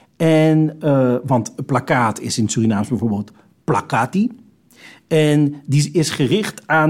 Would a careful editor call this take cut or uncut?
uncut